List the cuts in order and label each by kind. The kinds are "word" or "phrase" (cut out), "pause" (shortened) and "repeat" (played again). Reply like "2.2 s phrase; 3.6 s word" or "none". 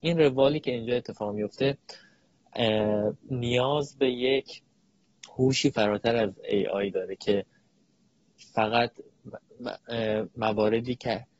3.2 s pause